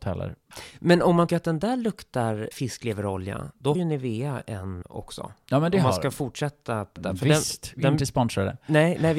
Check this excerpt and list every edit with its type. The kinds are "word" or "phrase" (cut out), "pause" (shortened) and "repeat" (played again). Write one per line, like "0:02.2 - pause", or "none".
0:01.3 - word
0:02.5 - word
0:03.7 - word
0:04.8 - word
0:07.0 - word